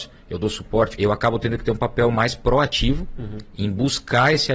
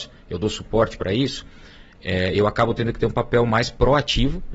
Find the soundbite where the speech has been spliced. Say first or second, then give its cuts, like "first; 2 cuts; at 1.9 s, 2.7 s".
first; 1 cut; at 1.0 s